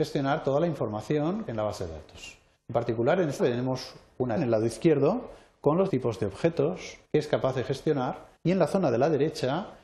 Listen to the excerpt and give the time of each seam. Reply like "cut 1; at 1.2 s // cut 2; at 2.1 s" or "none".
cut 1; at 1.5 s // cut 2; at 2.6 s // cut 3; at 3.4 s // cut 4; at 4.4 s // cut 5; at 5.9 s // cut 6; at 7.0 s // cut 7; at 8.4 s